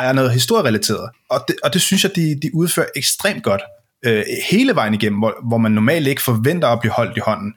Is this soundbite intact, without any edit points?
no; 1 cut; at 1.1 s

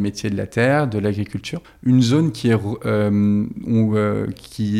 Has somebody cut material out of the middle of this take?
yes; 1 cut; at 1.6 s

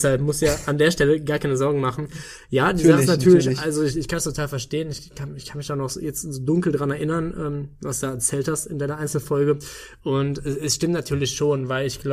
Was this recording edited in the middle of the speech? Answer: no; 0 cuts

